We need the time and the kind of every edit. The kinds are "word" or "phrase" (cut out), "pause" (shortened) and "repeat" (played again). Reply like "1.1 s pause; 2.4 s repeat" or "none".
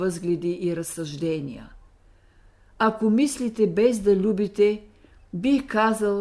none